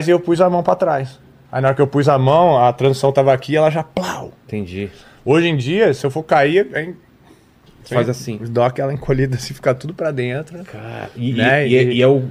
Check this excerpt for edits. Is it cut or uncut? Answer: uncut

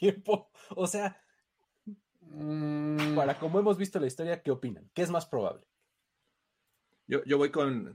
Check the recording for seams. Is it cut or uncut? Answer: cut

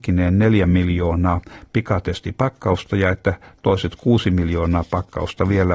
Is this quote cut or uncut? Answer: uncut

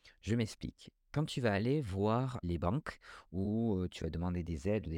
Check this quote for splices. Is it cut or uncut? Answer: cut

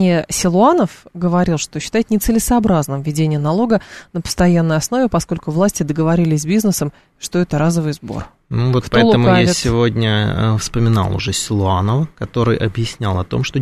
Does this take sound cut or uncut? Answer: uncut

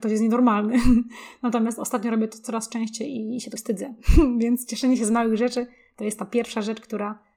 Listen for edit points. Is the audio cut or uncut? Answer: cut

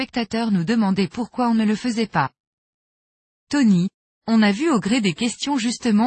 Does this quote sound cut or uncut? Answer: uncut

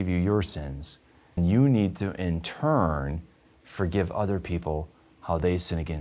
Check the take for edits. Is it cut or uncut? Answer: cut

